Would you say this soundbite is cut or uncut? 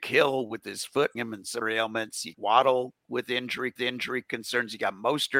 cut